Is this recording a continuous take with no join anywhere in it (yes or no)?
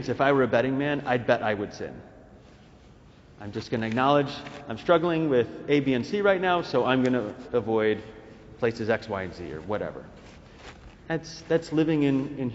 yes